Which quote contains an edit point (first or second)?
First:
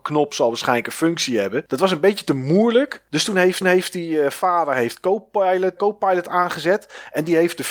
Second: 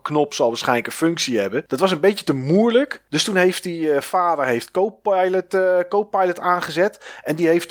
first